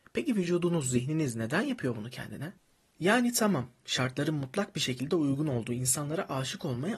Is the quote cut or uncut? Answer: uncut